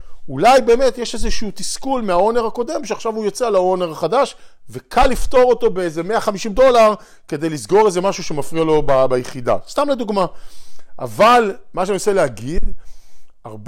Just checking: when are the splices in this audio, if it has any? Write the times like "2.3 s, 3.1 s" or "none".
none